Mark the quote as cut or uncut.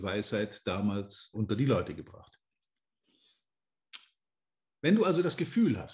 cut